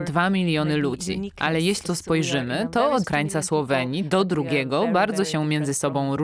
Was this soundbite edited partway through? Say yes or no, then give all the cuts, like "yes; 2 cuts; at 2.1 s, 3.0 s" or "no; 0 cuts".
yes; 2 cuts; at 1.8 s, 3.0 s